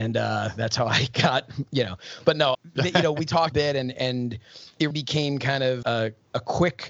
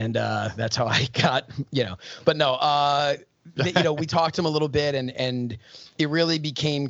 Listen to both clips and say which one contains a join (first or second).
first